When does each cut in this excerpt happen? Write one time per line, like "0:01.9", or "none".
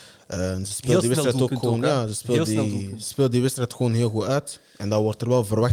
none